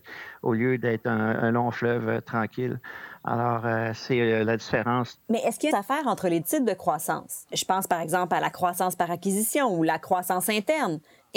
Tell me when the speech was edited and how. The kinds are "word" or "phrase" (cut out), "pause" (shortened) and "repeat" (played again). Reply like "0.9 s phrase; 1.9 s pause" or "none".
5.2 s pause; 5.7 s phrase